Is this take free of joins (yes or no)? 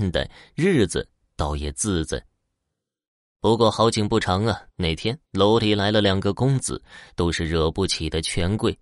no